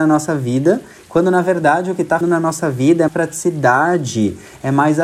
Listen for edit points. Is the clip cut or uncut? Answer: cut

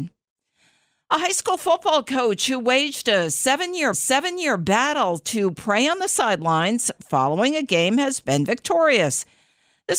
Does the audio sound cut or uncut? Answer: cut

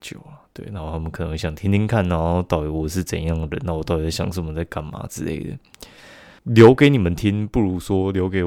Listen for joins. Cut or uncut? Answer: cut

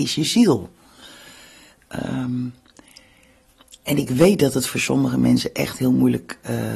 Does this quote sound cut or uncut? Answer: uncut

